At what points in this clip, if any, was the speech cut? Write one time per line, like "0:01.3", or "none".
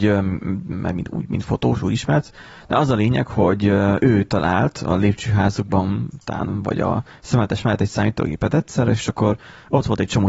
none